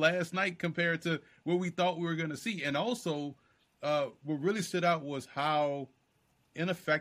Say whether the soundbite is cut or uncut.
uncut